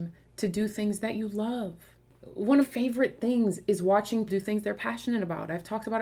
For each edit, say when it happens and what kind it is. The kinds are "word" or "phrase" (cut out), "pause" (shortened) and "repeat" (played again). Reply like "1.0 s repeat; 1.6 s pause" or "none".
2.6 s phrase; 4.3 s word